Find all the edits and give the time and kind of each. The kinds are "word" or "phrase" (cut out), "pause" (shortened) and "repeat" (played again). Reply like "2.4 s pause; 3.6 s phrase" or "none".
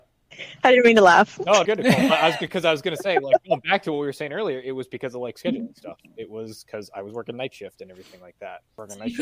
1.7 s word